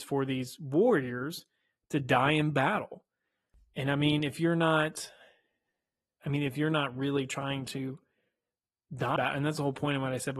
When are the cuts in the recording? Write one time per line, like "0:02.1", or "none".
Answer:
0:09.2